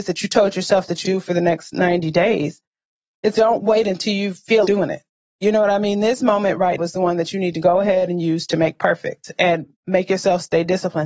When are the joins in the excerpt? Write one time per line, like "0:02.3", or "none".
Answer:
0:01.0
0:03.3
0:04.6
0:06.8